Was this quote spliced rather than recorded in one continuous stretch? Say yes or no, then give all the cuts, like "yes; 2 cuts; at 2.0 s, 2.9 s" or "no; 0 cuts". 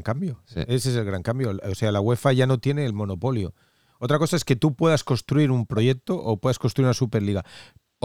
no; 0 cuts